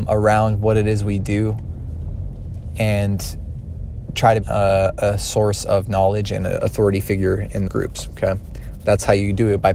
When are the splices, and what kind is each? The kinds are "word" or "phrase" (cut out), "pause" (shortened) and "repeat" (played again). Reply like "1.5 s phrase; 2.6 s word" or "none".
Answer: 4.4 s word; 7.7 s word